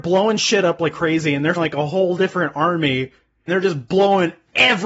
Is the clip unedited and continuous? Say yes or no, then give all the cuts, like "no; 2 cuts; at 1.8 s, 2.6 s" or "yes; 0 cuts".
no; 3 cuts; at 0.9 s, 1.6 s, 3.5 s